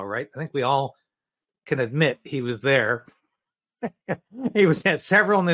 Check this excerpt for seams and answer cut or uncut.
uncut